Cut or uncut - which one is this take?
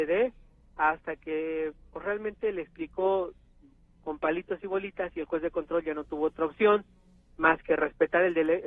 uncut